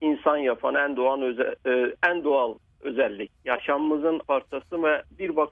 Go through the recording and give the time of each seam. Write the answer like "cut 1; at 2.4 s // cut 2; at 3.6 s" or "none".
cut 1; at 4.2 s